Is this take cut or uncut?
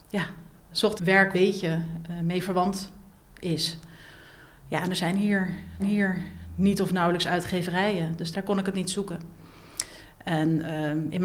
cut